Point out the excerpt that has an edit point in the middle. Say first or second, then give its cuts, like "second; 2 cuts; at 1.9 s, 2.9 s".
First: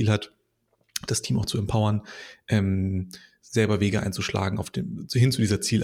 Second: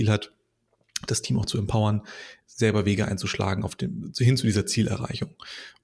second; 1 cut; at 2.4 s